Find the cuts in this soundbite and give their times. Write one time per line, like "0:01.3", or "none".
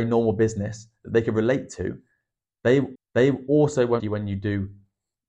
0:03.0
0:04.0